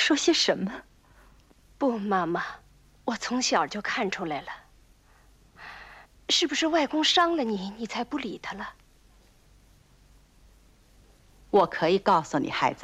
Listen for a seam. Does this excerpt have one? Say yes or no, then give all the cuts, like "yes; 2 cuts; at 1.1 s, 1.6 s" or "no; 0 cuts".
yes; 2 cuts; at 2.8 s, 6.1 s